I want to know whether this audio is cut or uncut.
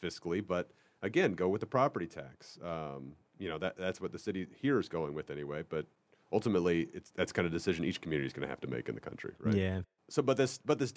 uncut